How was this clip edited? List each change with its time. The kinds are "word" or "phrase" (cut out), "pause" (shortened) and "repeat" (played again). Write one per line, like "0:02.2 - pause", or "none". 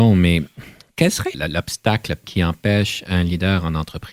0:01.3 - word
0:02.2 - word